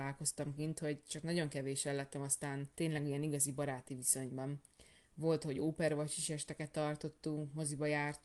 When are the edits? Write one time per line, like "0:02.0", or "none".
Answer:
0:02.7